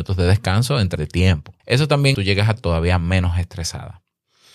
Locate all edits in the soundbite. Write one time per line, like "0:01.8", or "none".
0:01.0
0:01.6
0:02.1
0:02.6

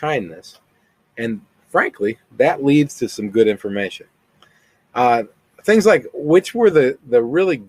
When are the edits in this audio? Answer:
none

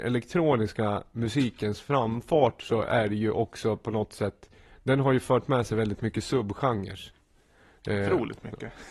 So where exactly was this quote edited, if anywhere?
none

